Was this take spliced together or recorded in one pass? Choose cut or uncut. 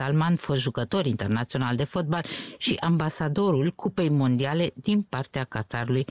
uncut